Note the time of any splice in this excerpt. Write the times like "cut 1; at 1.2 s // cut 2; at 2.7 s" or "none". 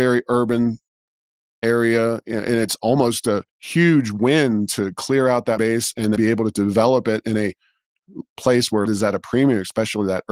cut 1; at 3.5 s // cut 2; at 5.6 s // cut 3; at 6.2 s // cut 4; at 8.9 s